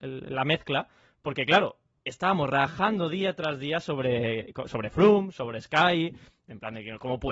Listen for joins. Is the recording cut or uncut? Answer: uncut